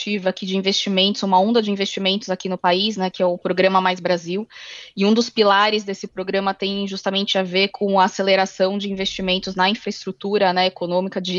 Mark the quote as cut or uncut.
uncut